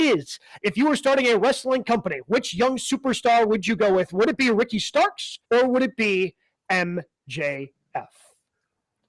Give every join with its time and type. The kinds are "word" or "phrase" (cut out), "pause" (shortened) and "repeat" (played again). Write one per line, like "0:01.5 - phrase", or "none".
0:05.4 - pause